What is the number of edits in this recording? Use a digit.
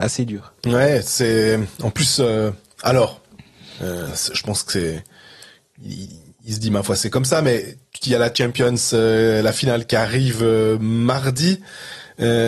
0